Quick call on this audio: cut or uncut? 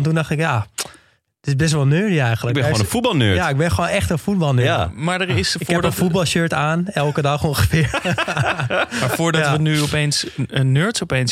uncut